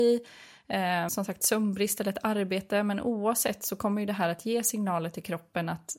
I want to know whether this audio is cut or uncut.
cut